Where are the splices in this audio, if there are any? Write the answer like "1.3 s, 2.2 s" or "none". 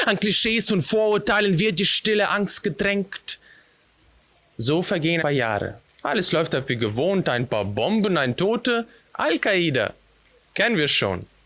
5.2 s, 5.9 s, 8.4 s